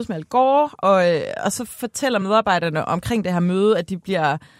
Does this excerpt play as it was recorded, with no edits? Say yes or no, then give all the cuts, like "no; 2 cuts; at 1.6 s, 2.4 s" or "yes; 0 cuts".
yes; 0 cuts